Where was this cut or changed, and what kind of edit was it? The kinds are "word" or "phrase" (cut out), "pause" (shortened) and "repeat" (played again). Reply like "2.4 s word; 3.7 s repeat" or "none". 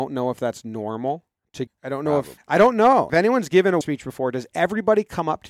1.7 s word; 2.4 s word; 3.1 s word; 3.8 s word